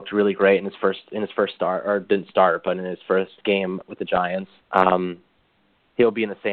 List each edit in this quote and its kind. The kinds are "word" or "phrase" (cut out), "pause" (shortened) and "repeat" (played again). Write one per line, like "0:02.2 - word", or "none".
0:04.6 - pause